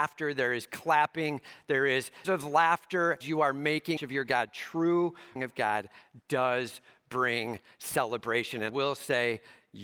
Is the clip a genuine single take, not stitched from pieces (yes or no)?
no